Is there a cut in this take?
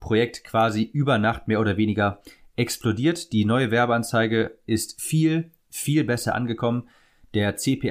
no; 0 cuts

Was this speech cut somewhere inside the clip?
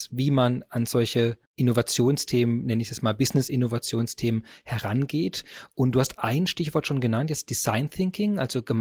yes; 1 cut; at 1.5 s

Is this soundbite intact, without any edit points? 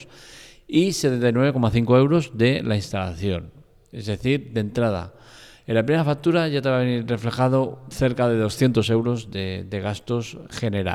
yes; 0 cuts

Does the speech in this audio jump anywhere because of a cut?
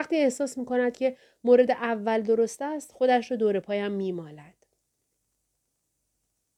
no; 0 cuts

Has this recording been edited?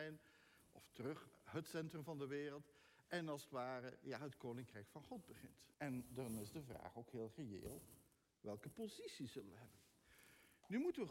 yes; 1 cut; at 5.7 s

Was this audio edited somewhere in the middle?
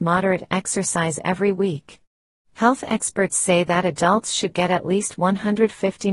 no; 0 cuts

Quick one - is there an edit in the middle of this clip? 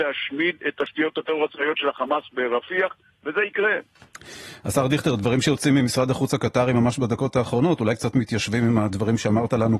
no; 0 cuts

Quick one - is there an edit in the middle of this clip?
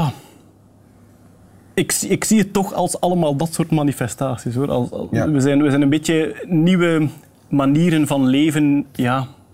no; 0 cuts

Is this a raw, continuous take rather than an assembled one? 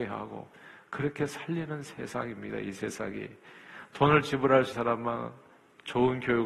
no; 1 cut; at 4.7 s

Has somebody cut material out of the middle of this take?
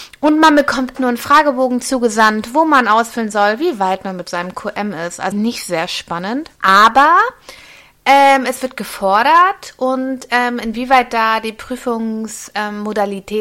yes; 3 cuts; at 0.9 s, 5.3 s, 6.6 s

